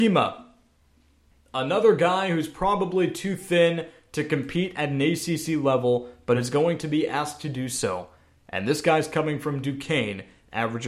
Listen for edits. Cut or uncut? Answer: uncut